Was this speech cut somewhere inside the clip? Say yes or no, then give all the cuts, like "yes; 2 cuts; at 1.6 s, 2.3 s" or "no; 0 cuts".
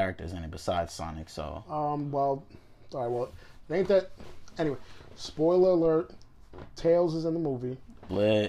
no; 0 cuts